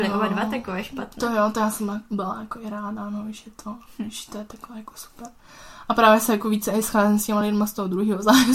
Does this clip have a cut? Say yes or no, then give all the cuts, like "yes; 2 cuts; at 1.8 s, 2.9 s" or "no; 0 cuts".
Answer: no; 0 cuts